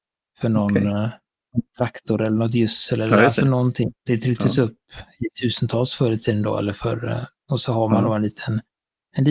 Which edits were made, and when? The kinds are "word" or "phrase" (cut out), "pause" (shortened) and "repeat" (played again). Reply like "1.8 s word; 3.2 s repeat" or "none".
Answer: 4.0 s pause

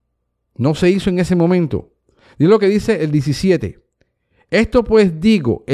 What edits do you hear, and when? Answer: 3.0 s word

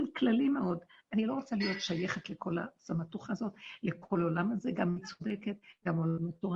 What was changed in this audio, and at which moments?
none

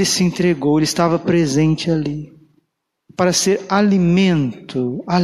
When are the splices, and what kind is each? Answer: none

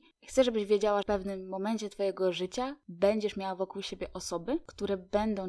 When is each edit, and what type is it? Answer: 1.0 s phrase

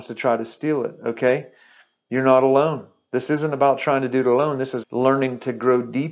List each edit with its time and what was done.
4.8 s word

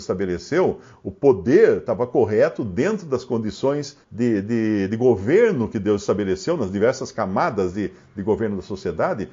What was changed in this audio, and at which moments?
4.0 s pause

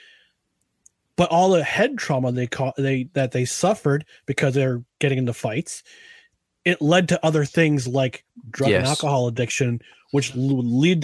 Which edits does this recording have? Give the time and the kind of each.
none

